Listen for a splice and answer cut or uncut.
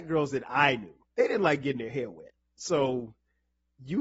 cut